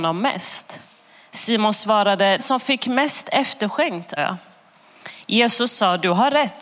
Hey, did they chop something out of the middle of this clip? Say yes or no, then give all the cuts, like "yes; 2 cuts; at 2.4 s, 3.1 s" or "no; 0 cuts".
yes; 2 cuts; at 2.4 s, 4.2 s